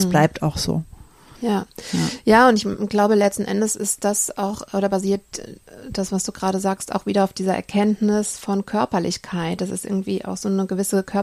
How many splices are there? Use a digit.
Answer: 0